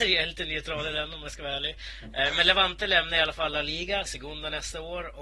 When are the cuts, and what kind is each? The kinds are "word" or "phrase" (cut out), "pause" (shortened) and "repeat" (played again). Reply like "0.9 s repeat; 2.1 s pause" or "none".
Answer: 4.0 s word